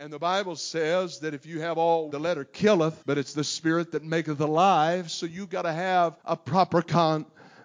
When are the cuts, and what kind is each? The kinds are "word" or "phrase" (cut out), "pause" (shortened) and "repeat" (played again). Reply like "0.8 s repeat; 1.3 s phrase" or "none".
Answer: 2.1 s word; 3.0 s pause; 6.2 s pause